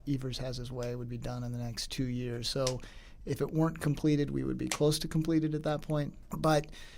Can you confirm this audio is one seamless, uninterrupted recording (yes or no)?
yes